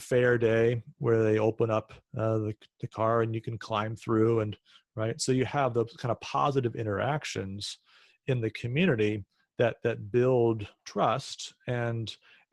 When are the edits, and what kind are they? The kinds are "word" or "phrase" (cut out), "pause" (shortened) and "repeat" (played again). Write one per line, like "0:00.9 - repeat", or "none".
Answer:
0:02.0 - pause
0:10.8 - pause